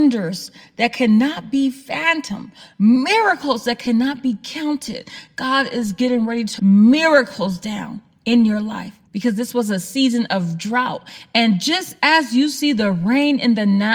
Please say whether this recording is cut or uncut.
cut